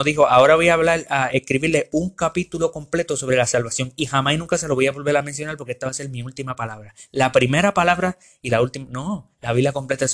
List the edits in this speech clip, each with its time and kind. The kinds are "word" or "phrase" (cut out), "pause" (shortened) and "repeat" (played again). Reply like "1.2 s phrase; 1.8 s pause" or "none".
none